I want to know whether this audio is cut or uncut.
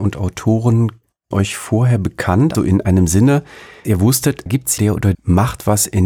cut